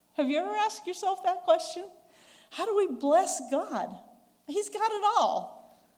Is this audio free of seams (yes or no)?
yes